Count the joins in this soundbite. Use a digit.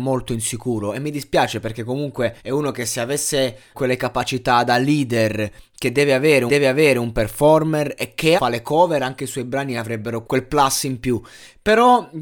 5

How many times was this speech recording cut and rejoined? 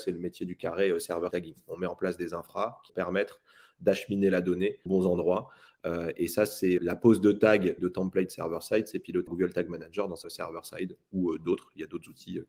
7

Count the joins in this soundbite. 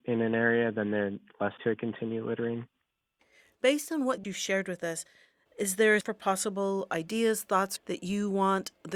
3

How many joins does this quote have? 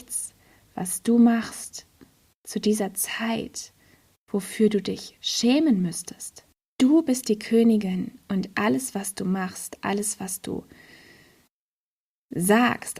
0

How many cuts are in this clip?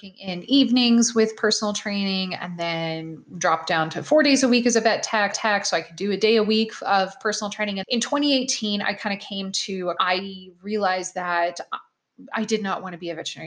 3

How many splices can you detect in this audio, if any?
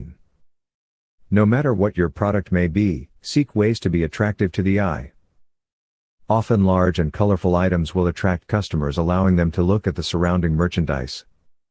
1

